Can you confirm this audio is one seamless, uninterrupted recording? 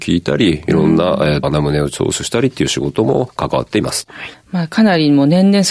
no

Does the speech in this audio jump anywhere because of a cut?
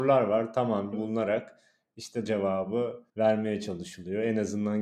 yes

